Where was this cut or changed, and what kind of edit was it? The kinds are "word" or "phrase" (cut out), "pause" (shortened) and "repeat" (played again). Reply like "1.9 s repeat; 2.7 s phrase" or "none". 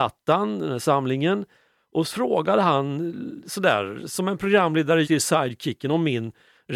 2.1 s word; 5.0 s word